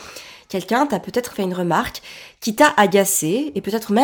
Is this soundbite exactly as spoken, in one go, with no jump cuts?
no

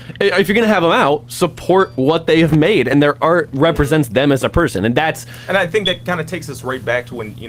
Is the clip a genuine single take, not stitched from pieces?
yes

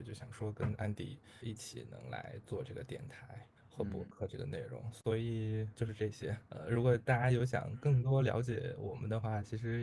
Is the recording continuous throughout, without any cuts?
no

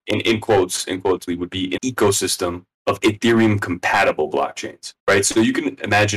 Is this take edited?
yes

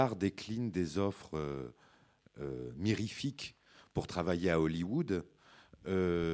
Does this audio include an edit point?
no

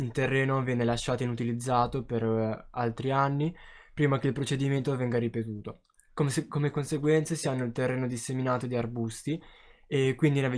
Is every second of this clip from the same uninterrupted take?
yes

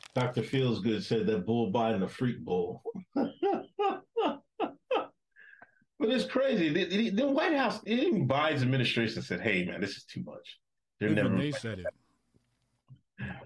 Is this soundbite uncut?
yes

